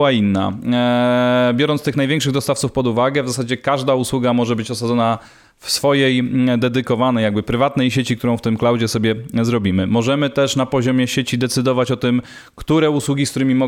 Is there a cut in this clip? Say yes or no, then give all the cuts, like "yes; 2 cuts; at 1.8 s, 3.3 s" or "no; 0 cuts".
no; 0 cuts